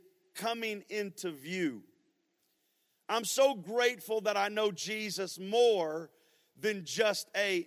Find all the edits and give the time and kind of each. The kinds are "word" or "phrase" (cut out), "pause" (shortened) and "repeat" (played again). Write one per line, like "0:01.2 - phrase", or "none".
none